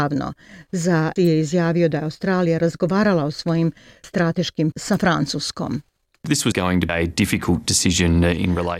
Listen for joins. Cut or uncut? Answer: cut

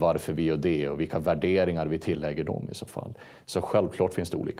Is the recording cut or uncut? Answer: uncut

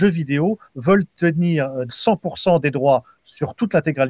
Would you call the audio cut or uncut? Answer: cut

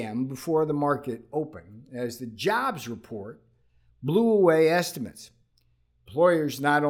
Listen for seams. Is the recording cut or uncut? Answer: uncut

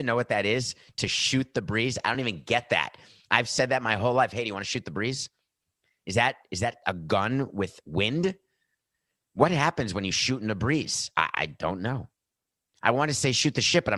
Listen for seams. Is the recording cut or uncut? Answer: uncut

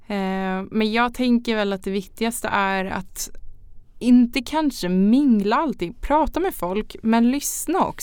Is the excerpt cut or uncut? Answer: uncut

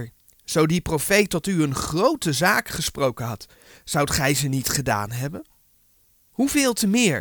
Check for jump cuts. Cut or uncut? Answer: uncut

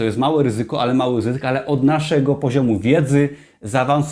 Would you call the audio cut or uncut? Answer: uncut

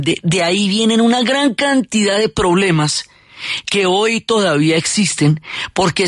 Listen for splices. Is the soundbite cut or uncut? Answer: uncut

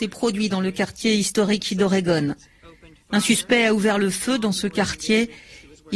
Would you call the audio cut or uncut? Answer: uncut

